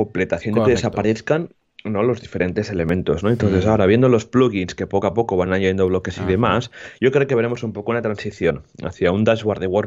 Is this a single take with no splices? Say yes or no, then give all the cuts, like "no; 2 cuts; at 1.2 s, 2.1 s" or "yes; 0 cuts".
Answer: yes; 0 cuts